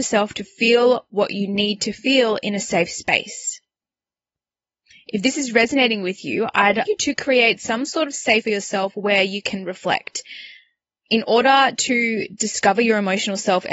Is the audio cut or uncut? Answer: cut